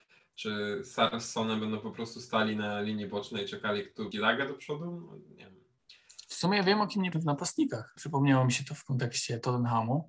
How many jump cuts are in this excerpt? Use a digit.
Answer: 3